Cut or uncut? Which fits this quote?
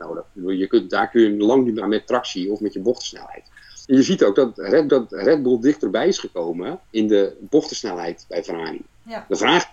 cut